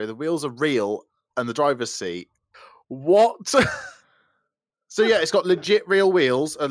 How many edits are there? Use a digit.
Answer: 0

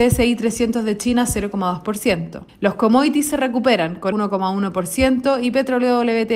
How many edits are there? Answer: 2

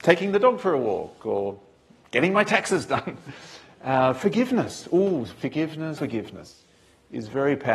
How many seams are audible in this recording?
1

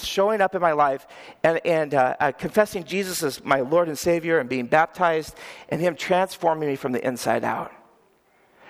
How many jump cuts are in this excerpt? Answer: 0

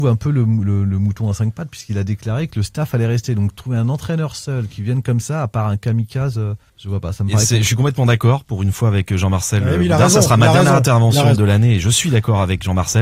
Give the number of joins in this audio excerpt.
2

